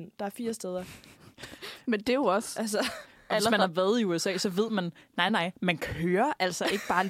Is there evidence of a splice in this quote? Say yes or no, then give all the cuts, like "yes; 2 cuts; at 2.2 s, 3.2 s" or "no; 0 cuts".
no; 0 cuts